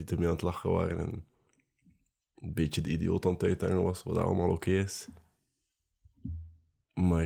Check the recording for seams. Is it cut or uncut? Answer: uncut